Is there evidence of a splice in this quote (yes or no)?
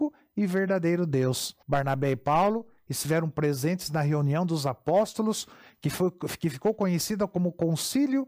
yes